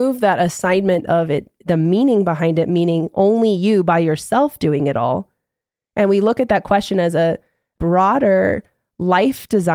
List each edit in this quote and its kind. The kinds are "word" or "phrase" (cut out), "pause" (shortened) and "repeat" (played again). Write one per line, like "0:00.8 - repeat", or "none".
none